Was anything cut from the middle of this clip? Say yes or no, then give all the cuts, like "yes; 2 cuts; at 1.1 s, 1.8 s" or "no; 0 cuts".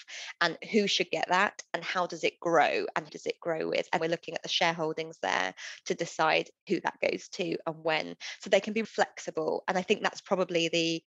yes; 3 cuts; at 3.1 s, 4.0 s, 8.8 s